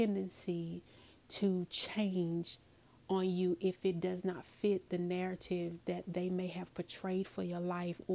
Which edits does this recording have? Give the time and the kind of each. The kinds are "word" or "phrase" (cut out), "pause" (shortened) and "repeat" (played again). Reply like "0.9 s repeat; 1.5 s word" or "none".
none